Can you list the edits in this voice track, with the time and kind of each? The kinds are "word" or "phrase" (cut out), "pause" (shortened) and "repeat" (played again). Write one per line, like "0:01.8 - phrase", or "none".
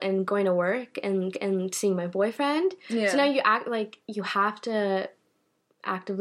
0:01.3 - repeat